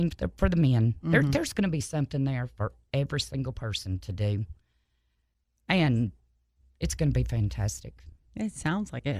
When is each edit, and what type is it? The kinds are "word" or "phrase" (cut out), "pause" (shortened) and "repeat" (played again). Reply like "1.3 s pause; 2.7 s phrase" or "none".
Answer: none